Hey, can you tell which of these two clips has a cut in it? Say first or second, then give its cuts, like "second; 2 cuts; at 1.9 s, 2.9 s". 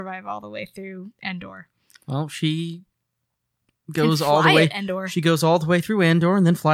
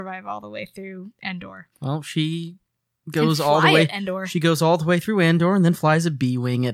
second; 2 cuts; at 1.7 s, 2.9 s